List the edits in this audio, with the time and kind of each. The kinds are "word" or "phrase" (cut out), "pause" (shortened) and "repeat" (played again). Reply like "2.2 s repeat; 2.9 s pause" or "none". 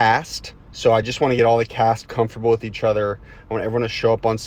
none

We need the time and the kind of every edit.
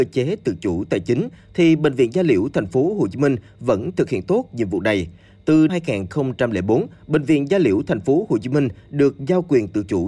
5.7 s word

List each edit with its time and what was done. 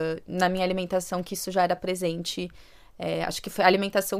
none

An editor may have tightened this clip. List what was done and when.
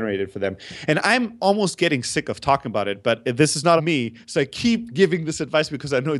3.8 s word

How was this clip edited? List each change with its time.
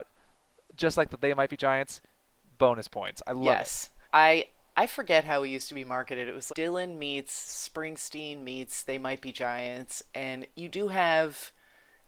4.0 s pause; 6.5 s word; 10.5 s pause

